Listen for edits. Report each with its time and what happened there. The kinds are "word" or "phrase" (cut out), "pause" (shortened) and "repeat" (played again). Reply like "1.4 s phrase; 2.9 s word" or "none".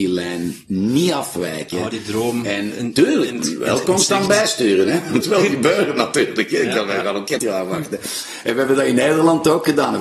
5.2 s phrase; 7.4 s word